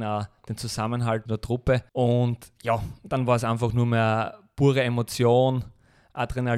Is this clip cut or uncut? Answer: cut